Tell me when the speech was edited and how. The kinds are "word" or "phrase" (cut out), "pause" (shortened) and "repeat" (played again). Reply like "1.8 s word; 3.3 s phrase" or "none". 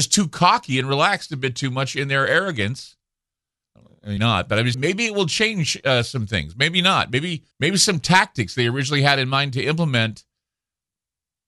4.2 s word; 4.7 s word; 7.5 s pause

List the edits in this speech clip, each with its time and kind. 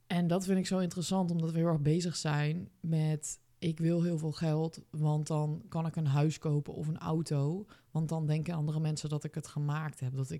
none

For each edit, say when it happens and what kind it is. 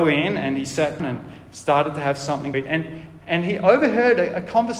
1.0 s word; 2.5 s word

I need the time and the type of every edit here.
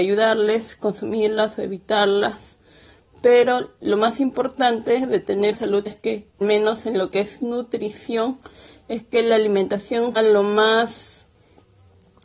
5.5 s word; 5.9 s word; 6.4 s word; 10.2 s word

